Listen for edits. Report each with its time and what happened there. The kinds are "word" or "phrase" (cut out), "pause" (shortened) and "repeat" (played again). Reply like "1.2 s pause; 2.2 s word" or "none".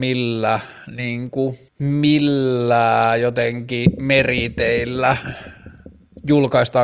1.7 s pause